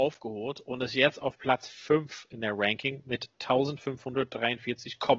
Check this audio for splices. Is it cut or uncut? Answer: uncut